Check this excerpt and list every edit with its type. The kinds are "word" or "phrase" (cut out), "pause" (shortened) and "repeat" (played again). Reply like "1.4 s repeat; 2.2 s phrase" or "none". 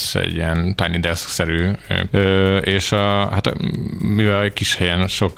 2.1 s word